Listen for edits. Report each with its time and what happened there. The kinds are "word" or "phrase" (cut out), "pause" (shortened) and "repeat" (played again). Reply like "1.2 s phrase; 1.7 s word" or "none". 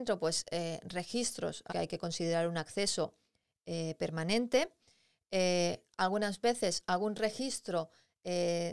1.7 s word